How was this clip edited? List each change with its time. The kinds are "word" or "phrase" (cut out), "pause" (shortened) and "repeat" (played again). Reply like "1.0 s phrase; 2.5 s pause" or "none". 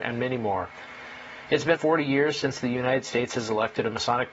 1.8 s word